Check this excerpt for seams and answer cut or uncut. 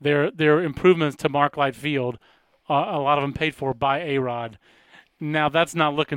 uncut